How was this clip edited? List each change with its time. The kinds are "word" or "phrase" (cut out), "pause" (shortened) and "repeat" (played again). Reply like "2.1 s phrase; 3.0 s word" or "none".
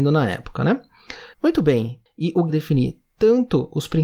1.3 s pause; 2.5 s phrase